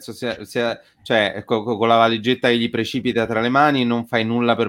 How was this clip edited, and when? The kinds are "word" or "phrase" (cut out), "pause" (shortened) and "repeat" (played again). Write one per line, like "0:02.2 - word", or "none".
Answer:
none